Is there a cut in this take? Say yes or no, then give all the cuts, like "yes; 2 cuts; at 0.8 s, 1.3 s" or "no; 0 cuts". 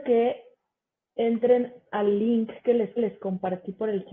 yes; 1 cut; at 3.0 s